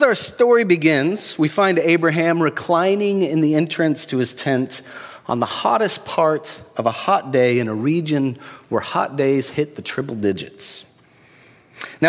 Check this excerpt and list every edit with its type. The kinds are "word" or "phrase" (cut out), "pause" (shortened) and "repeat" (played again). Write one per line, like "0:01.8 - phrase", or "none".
none